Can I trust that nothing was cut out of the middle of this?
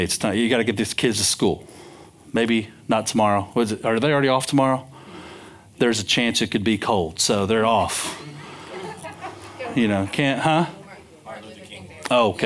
yes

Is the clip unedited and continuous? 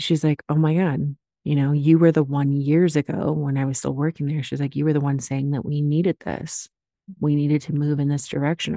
yes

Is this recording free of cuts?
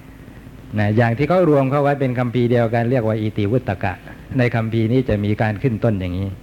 no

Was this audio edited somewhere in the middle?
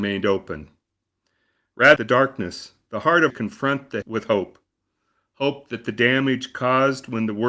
yes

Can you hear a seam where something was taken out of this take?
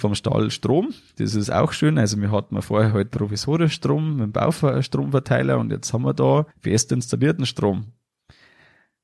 yes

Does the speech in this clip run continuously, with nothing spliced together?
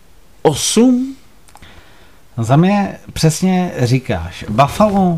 yes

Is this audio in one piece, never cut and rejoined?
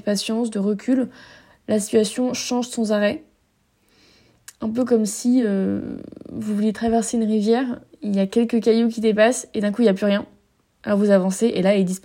yes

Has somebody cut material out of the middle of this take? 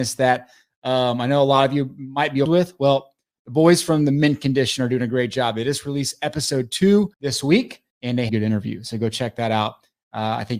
yes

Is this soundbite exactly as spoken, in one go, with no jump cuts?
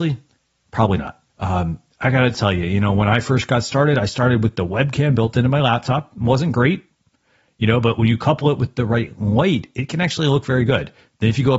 no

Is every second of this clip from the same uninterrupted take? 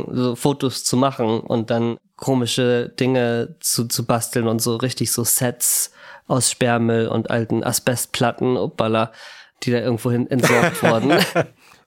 yes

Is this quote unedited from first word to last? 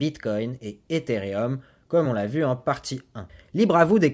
yes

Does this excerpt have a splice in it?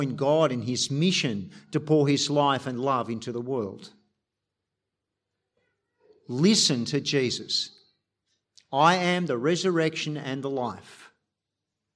no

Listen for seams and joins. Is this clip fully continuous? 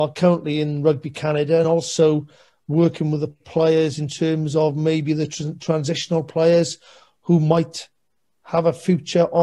yes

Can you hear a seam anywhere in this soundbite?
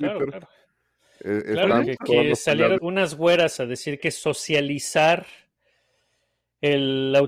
yes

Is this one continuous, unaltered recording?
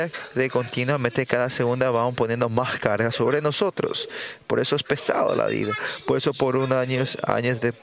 yes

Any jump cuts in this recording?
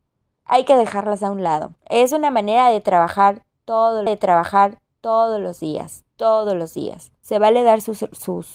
yes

